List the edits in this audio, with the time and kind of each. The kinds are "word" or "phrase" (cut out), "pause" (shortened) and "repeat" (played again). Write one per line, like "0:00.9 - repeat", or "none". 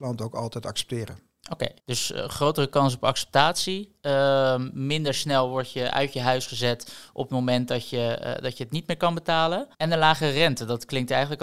0:01.8 - pause
0:09.7 - pause